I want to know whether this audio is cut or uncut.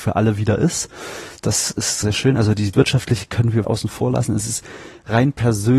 cut